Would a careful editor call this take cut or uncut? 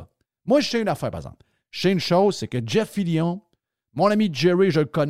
uncut